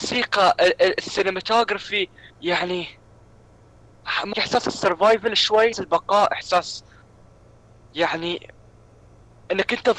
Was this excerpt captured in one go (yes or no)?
no